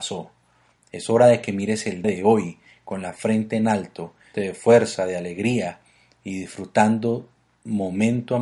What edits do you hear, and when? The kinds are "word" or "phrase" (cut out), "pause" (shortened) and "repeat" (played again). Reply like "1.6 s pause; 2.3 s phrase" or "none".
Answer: 2.0 s word; 4.3 s word